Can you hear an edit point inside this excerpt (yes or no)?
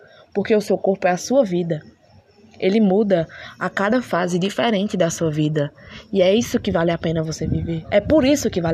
no